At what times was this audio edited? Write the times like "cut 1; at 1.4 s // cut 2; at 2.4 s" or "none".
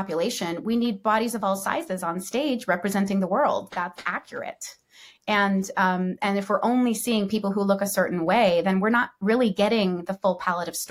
none